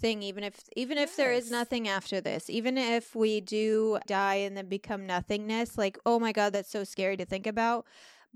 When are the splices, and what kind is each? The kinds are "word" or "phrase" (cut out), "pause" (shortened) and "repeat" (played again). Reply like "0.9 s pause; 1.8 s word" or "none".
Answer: 4.0 s word